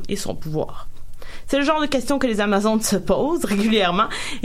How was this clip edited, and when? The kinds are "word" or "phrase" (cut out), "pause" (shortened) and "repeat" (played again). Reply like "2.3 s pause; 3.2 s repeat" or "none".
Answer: none

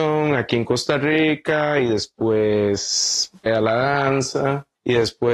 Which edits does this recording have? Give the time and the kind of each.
3.5 s phrase

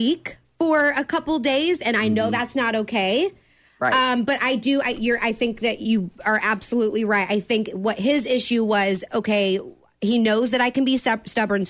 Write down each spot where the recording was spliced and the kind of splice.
none

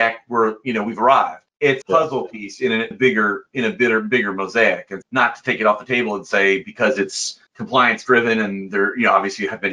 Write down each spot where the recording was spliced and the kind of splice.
1.8 s word; 2.9 s phrase; 5.0 s word; 7.5 s pause

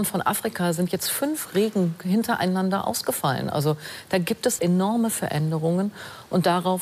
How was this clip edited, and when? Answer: 4.6 s word

